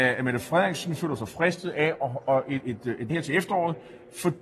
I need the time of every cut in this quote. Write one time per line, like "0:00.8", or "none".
0:02.6
0:03.1